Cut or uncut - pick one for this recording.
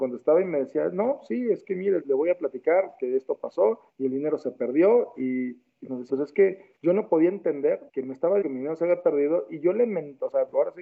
cut